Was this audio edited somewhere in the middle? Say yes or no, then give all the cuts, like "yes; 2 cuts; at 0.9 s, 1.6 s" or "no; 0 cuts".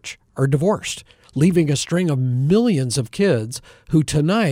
no; 0 cuts